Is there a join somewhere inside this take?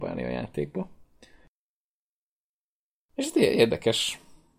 no; 0 cuts

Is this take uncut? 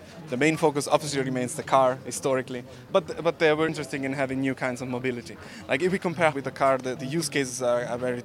no; 4 cuts; at 2.9 s, 3.7 s, 6.3 s, 7.0 s

